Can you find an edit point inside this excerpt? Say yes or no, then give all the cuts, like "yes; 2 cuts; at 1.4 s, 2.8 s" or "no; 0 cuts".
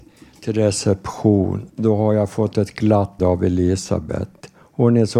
yes; 2 cuts; at 1.7 s, 3.2 s